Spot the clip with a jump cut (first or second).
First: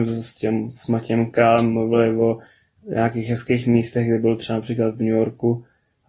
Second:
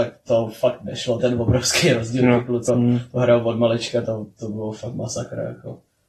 second